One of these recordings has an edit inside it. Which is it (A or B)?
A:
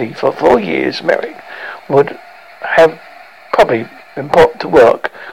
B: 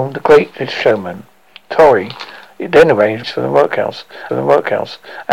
B